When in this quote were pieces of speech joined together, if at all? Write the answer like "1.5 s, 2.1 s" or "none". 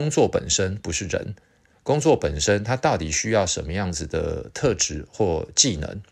none